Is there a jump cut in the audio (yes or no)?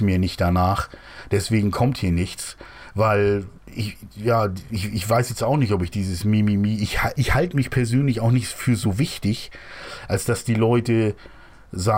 yes